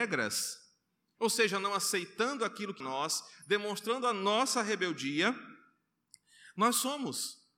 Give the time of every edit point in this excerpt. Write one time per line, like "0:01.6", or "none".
0:02.8